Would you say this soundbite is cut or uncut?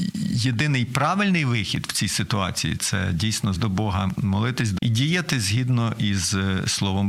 cut